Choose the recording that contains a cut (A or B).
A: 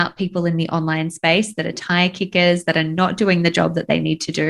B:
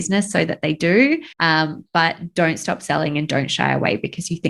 B